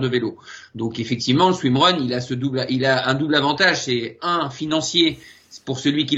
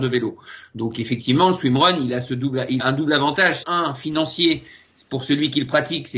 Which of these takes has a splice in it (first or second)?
second